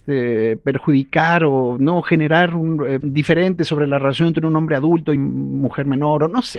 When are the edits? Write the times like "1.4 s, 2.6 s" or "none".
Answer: 3.0 s, 5.2 s